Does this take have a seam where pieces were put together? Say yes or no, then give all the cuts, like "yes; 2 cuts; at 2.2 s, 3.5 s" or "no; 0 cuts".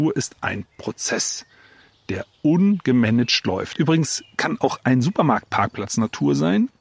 no; 0 cuts